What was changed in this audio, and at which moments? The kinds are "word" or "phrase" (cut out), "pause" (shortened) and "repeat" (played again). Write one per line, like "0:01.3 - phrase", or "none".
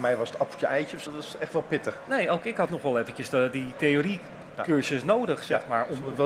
0:01.1 - word
0:02.7 - word

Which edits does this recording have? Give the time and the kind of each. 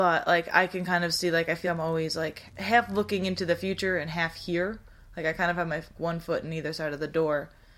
0:01.6 - word
0:02.5 - word
0:06.0 - word

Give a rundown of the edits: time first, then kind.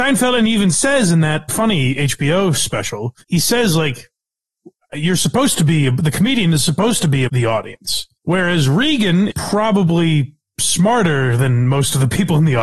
0:01.5 - word
0:03.2 - pause
0:04.8 - word
0:07.3 - word
0:08.1 - pause
0:09.3 - word

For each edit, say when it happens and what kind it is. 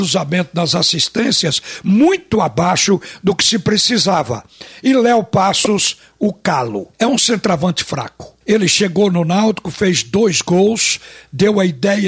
0:06.9 - pause
0:08.4 - pause

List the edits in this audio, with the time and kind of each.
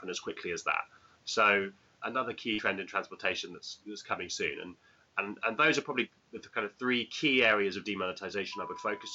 none

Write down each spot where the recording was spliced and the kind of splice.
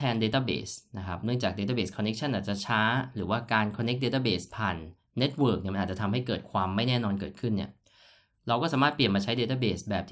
none

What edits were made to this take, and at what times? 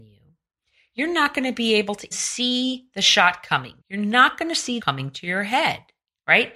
0:02.1 - word
0:03.8 - pause
0:04.8 - phrase

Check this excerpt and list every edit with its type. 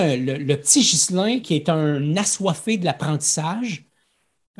0:01.4 - word

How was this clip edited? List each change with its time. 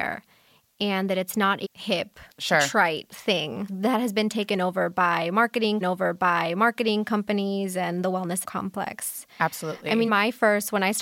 0:01.6 - word
0:02.3 - pause
0:03.7 - phrase
0:05.8 - repeat
0:08.4 - word
0:10.1 - word

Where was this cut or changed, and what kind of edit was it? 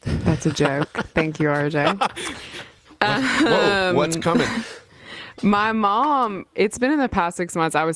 none

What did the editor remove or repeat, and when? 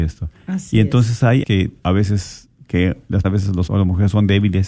0:01.4 - word
0:01.8 - phrase
0:03.2 - word
0:03.7 - word

